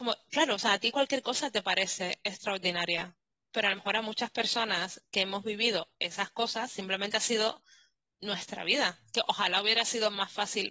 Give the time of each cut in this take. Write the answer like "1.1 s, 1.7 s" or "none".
none